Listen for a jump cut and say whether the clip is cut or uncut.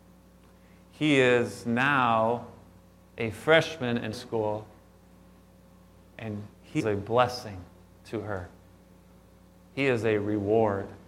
cut